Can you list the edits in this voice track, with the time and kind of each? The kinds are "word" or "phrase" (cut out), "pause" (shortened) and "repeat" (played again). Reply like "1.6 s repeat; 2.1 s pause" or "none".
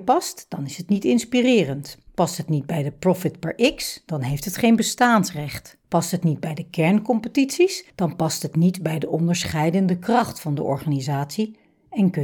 2.1 s pause; 5.8 s pause